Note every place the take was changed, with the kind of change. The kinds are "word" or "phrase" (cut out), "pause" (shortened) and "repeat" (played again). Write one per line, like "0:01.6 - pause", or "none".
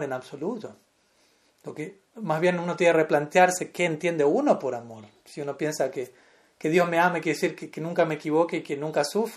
none